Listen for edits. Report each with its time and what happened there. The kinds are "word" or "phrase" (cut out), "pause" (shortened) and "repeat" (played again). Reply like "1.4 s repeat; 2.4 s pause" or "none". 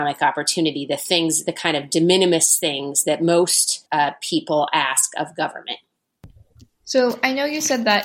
3.9 s pause

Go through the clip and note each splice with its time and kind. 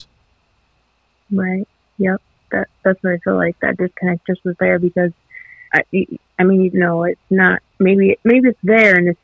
5.7 s pause; 6.7 s word

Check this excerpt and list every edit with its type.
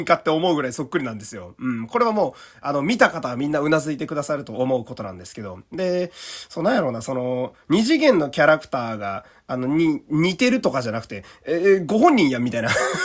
none

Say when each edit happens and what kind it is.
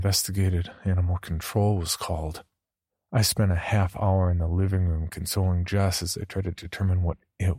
2.9 s pause

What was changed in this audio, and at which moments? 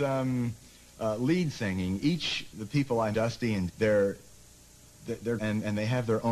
2.5 s word; 3.1 s word; 3.7 s word; 5.4 s word

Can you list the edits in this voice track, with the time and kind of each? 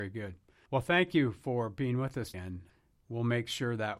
2.3 s word

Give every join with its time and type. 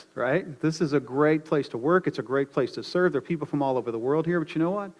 none

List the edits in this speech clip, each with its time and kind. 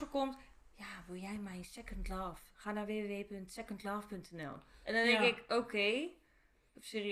none

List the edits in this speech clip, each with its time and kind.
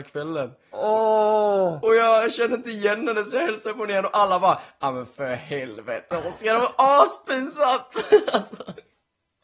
none

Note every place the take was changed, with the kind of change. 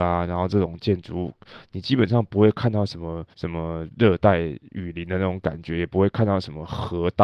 3.3 s pause

